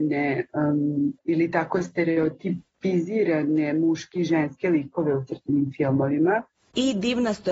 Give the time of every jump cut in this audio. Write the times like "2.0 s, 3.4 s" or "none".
1.2 s